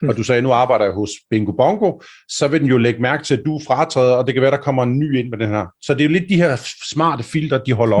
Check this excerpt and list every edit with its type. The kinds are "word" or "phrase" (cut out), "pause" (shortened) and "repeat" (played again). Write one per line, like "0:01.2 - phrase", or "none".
none